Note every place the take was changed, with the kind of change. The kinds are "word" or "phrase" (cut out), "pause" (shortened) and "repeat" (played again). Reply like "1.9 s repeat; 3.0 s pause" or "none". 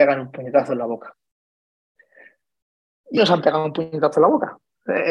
3.2 s word